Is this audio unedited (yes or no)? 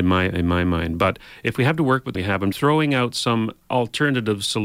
no